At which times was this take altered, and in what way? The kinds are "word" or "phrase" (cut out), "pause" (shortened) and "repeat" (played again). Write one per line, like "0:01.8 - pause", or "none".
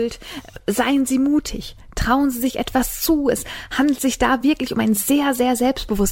none